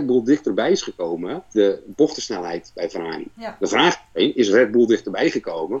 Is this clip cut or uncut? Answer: cut